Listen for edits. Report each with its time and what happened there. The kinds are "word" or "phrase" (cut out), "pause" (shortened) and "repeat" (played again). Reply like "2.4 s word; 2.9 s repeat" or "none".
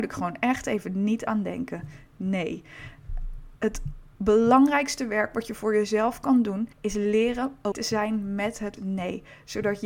3.6 s pause; 6.7 s pause; 7.7 s word; 8.8 s word